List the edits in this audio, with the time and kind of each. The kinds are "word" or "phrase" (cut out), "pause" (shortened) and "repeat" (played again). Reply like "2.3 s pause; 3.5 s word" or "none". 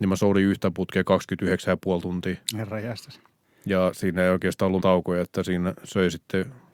2.4 s pause; 4.8 s word